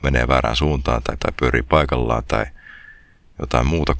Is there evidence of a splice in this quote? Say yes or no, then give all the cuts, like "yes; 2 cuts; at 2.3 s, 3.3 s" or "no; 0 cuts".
yes; 1 cut; at 1.2 s